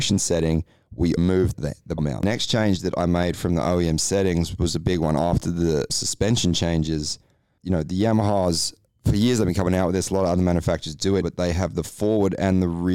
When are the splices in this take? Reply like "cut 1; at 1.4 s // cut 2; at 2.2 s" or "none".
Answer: cut 1; at 1.2 s // cut 2; at 1.5 s // cut 3; at 2.0 s // cut 4; at 5.9 s // cut 5; at 7.6 s // cut 6; at 11.2 s